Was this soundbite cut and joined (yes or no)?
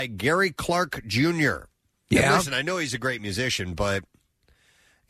no